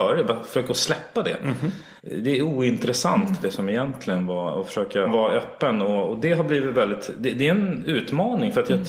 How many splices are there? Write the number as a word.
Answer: two